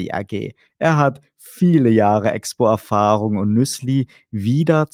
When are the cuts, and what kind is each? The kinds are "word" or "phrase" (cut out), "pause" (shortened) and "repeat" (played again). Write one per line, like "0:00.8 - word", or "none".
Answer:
none